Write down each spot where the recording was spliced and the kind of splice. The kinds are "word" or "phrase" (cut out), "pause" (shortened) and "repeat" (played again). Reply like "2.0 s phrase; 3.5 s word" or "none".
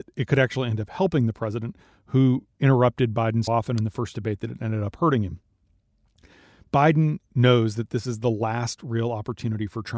3.5 s word